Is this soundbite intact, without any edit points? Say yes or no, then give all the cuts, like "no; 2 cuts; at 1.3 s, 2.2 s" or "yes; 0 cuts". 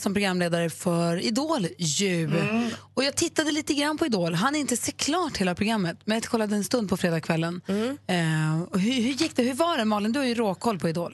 yes; 0 cuts